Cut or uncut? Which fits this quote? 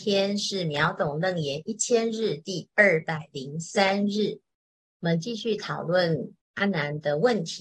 cut